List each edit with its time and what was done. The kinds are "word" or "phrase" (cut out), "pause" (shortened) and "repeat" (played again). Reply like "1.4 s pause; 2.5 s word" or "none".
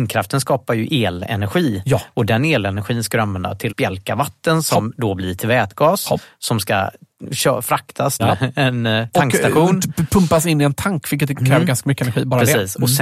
3.7 s word; 8.2 s word